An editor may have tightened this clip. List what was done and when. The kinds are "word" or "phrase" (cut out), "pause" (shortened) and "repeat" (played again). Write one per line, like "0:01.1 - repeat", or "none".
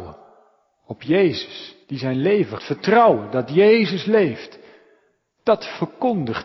0:01.8 - pause
0:02.6 - phrase